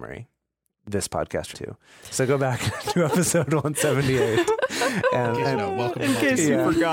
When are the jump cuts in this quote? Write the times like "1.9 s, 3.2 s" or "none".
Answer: 1.5 s, 5.6 s